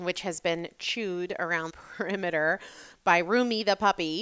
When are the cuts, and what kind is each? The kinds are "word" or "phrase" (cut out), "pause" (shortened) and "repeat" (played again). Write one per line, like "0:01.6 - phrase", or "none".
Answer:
0:01.7 - word